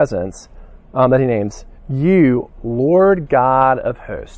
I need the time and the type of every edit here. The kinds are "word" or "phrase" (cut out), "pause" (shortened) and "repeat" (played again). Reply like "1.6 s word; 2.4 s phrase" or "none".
1.8 s pause